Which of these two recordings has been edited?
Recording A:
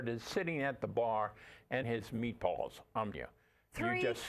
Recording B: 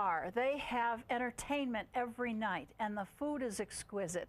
A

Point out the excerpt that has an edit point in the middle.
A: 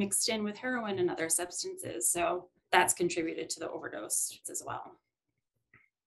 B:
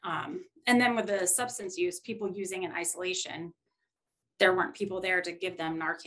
A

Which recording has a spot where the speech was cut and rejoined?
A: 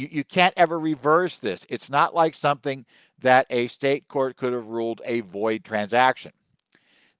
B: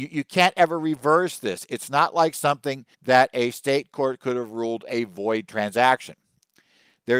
B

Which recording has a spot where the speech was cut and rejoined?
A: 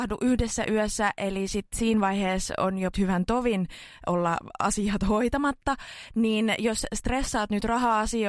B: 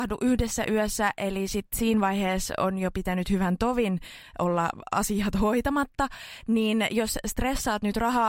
A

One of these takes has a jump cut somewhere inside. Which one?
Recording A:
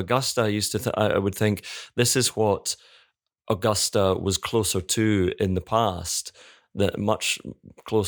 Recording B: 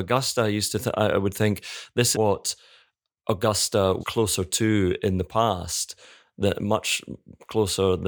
B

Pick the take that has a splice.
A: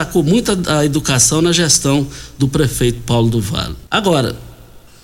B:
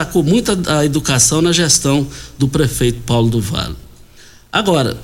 A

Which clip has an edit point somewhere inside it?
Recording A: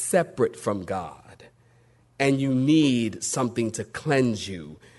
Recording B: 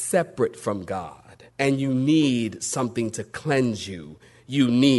B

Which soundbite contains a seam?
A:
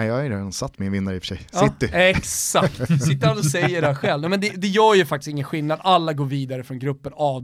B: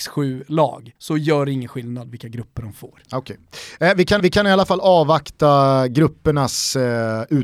B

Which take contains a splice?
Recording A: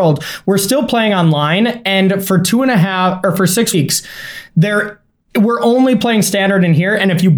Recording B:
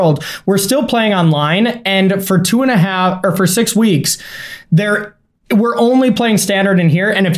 A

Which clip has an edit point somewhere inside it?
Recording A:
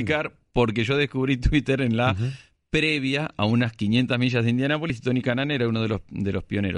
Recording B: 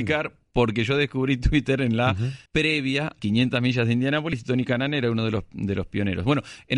B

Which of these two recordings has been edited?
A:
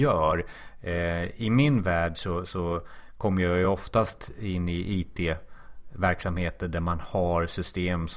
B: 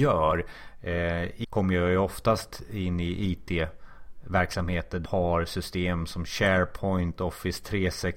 B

